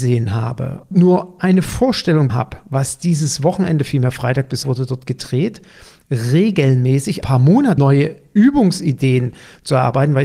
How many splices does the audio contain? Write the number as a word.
six